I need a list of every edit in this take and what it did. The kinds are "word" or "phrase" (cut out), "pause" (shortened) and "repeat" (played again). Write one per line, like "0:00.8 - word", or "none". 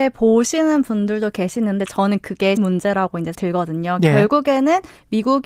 0:02.6 - word
0:03.3 - word